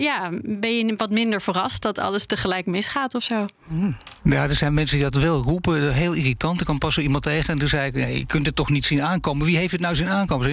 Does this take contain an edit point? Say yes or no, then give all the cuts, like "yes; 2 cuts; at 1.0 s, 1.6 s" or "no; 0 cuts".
yes; 1 cut; at 5.1 s